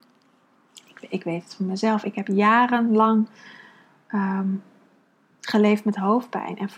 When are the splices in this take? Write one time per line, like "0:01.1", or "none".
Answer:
none